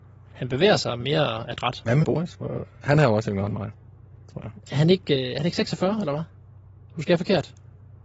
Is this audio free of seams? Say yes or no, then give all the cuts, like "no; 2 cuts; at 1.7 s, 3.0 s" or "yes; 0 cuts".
no; 2 cuts; at 2.0 s, 4.6 s